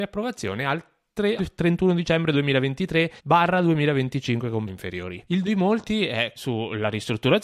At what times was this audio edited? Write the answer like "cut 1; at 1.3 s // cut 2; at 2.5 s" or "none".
cut 1; at 1.4 s // cut 2; at 3.2 s // cut 3; at 4.7 s // cut 4; at 5.4 s // cut 5; at 6.4 s

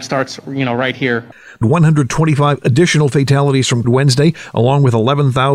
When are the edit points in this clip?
cut 1; at 1.6 s // cut 2; at 3.8 s

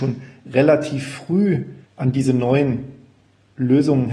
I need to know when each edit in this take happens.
cut 1; at 1.8 s

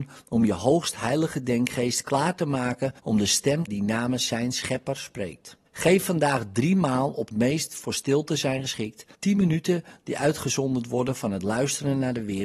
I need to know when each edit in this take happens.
cut 1; at 3.0 s // cut 2; at 3.7 s // cut 3; at 5.7 s // cut 4; at 7.3 s // cut 5; at 9.1 s

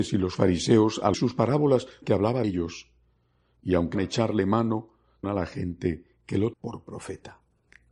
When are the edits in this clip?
cut 1; at 1.1 s // cut 2; at 2.0 s // cut 3; at 2.4 s // cut 4; at 3.9 s // cut 5; at 5.2 s // cut 6; at 6.5 s

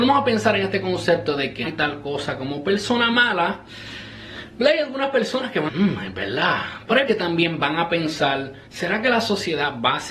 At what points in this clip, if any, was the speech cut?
cut 1; at 1.6 s // cut 2; at 5.7 s // cut 3; at 7.1 s // cut 4; at 8.7 s

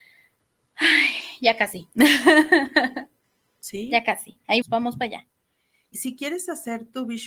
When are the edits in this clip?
cut 1; at 4.6 s // cut 2; at 5.9 s

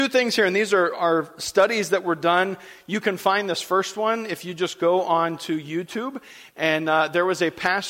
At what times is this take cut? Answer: none

